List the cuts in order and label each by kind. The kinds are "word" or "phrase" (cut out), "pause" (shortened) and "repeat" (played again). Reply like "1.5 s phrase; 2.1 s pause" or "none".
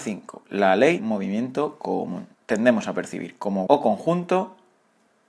1.0 s word; 2.3 s pause; 3.7 s word